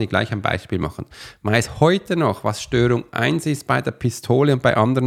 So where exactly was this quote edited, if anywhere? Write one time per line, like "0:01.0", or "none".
none